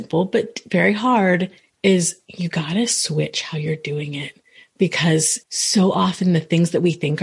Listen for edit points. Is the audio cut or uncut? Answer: cut